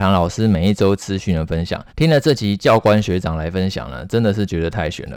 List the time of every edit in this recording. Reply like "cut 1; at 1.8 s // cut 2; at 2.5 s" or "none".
cut 1; at 1.9 s

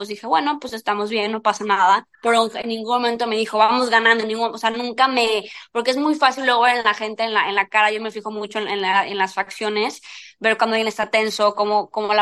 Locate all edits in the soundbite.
cut 1; at 2.1 s

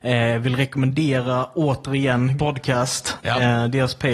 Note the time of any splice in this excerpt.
cut 1; at 2.4 s

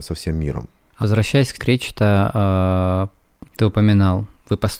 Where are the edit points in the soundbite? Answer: cut 1; at 1.0 s // cut 2; at 1.6 s // cut 3; at 3.4 s

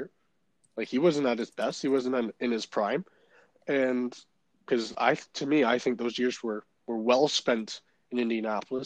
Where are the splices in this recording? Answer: none

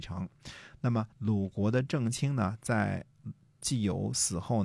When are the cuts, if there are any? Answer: cut 1; at 1.1 s

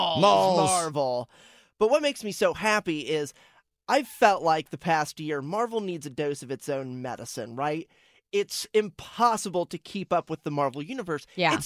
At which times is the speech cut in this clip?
none

